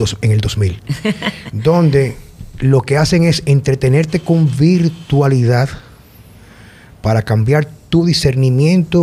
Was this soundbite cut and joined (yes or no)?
no